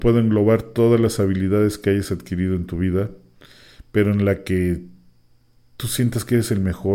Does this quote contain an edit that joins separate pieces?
no; 0 cuts

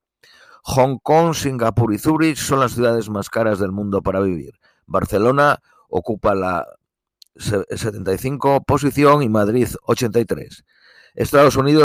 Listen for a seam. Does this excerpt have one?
no; 0 cuts

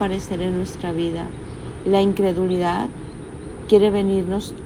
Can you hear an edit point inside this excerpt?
no; 0 cuts

